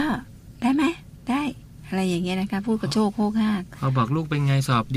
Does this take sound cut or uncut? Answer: uncut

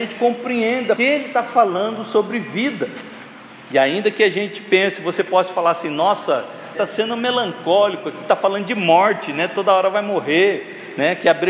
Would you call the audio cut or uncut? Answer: cut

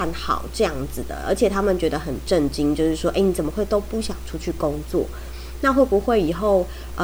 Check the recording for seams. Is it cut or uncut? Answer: uncut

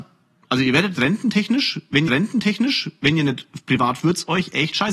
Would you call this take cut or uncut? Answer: cut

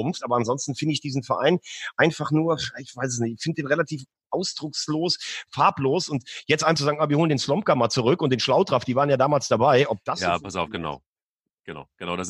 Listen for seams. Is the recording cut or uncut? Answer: cut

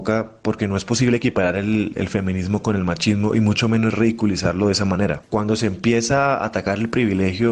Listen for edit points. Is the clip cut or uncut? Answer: uncut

